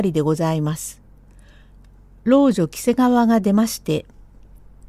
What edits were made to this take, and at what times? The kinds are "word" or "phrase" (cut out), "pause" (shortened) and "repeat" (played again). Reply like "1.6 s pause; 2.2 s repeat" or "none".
none